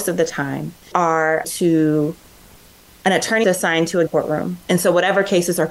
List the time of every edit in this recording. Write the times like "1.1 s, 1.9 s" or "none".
0.9 s, 1.4 s, 3.4 s, 4.1 s

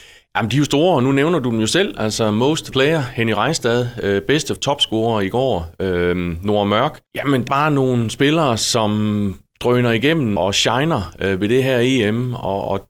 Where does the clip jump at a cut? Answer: 2.7 s, 4.6 s, 7.1 s, 7.5 s, 10.4 s

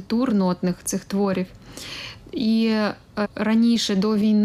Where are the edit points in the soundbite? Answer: 3.2 s

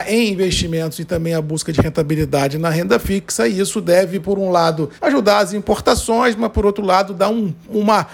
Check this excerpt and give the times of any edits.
5.0 s

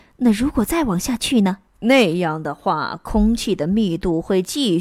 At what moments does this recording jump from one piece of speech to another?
1.7 s

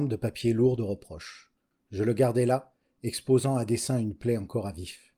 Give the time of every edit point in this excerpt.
none

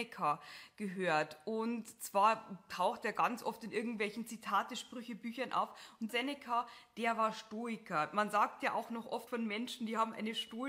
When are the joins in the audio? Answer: 6.1 s, 9.3 s

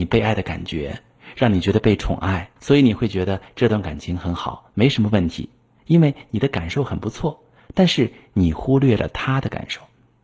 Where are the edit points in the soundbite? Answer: 2.6 s

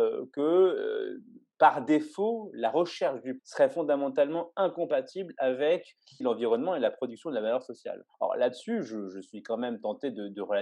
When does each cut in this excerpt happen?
3.4 s, 6.2 s, 8.1 s

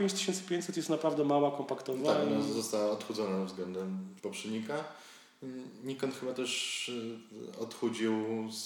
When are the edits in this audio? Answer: 4.2 s

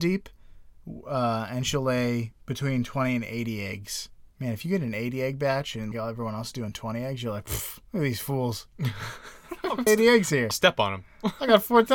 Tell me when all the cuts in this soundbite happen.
2.4 s, 4.3 s, 5.9 s, 7.8 s, 9.9 s, 10.5 s

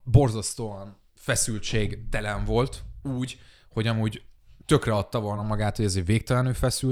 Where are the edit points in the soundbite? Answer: none

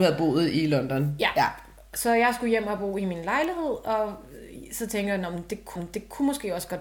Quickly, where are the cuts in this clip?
5.8 s

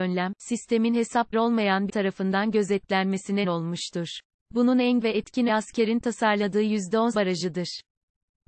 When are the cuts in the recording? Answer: 1.3 s, 1.9 s, 3.4 s, 4.3 s, 5.0 s, 5.5 s, 7.1 s

